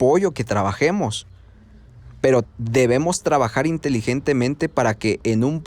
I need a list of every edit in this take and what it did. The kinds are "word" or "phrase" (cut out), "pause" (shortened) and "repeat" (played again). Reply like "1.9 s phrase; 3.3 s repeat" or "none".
2.4 s word